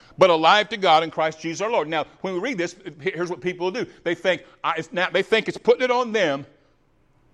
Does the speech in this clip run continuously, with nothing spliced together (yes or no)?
yes